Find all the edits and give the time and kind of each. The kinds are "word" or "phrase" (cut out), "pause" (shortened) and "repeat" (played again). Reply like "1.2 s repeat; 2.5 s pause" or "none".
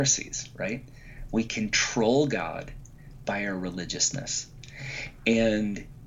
1.5 s word